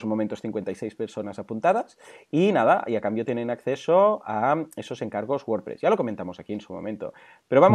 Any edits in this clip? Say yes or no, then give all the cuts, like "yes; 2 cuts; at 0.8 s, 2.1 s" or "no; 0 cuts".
no; 0 cuts